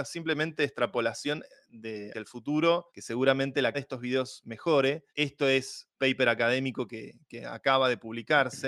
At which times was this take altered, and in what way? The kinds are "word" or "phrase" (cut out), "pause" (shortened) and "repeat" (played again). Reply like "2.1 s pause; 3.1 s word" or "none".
2.1 s word; 2.9 s pause; 3.7 s word; 5.1 s pause; 6.0 s phrase